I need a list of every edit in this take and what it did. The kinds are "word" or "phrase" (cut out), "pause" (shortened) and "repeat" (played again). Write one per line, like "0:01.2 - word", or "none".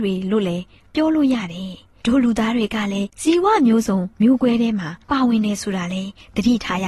0:03.1 - pause
0:04.1 - pause
0:05.0 - pause